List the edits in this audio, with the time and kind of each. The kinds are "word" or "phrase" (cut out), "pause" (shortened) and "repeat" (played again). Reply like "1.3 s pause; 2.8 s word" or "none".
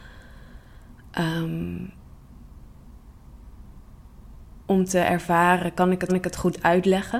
6.1 s repeat